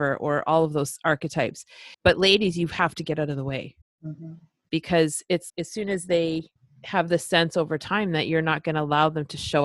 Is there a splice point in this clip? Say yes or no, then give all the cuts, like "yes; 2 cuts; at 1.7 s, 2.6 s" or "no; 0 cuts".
yes; 4 cuts; at 1.9 s, 3.8 s, 5.5 s, 6.6 s